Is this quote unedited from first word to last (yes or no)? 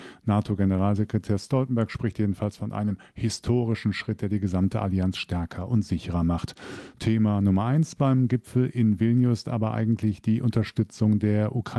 yes